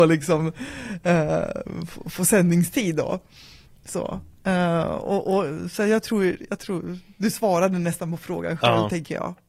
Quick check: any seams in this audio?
no; 0 cuts

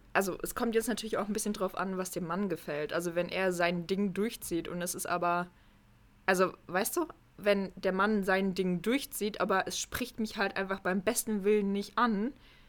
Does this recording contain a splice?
no; 0 cuts

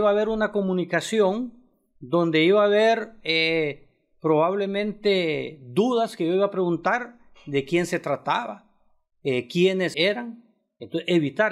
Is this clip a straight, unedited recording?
no; 1 cut; at 9.9 s

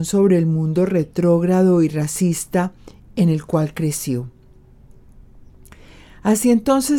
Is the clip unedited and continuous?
yes; 0 cuts

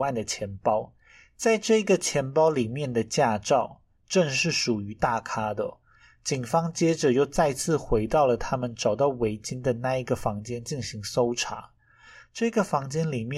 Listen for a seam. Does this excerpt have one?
no; 0 cuts

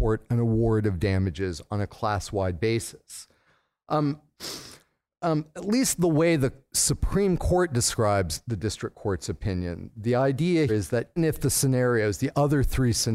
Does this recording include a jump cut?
yes; 2 cuts; at 10.7 s, 11.2 s

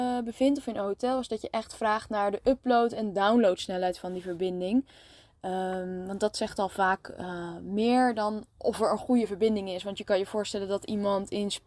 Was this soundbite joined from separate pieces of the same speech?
no; 0 cuts

